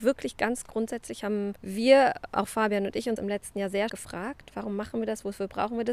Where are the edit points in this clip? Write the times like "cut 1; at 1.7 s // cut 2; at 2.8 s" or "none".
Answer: cut 1; at 1.6 s // cut 2; at 3.2 s // cut 3; at 3.9 s